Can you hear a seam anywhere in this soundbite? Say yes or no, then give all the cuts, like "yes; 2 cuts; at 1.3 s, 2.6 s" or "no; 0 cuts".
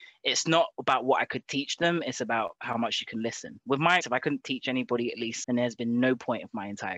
yes; 2 cuts; at 4.0 s, 5.4 s